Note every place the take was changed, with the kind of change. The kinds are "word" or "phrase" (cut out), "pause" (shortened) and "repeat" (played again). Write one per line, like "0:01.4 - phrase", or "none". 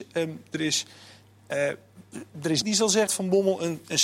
0:02.6 - word
0:03.1 - word